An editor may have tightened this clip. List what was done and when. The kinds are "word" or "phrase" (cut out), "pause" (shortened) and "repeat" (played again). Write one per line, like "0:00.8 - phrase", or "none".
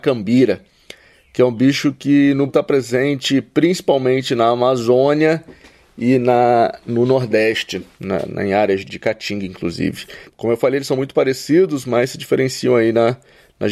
0:02.5 - word
0:08.9 - word
0:10.2 - pause